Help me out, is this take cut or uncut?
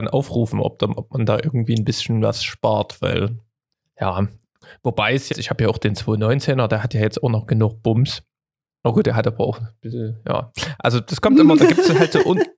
cut